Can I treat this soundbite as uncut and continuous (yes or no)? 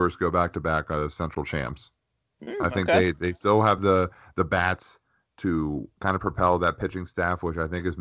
yes